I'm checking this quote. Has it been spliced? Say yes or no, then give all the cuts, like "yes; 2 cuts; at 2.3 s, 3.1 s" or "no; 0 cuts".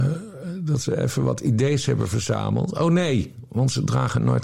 no; 0 cuts